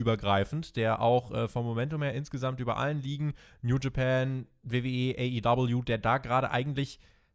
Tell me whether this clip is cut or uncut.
uncut